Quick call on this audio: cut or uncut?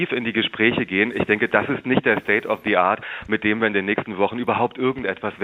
uncut